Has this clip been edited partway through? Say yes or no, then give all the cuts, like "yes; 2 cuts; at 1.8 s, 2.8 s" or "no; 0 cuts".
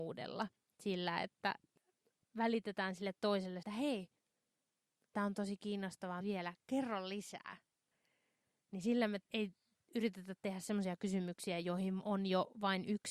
yes; 2 cuts; at 3.6 s, 6.2 s